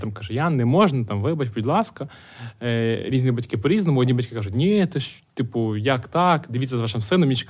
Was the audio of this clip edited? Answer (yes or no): no